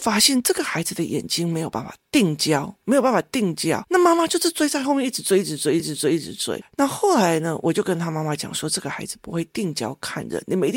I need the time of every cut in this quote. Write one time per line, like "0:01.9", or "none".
0:05.8